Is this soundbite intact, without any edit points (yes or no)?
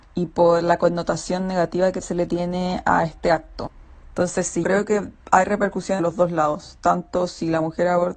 no